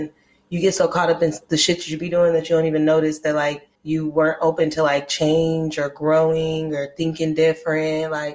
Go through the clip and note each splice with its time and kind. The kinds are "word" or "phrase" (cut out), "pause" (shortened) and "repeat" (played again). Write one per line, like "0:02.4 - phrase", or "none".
0:03.7 - pause